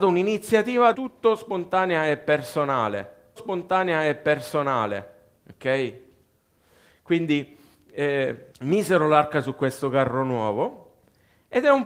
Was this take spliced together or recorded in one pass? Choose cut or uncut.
cut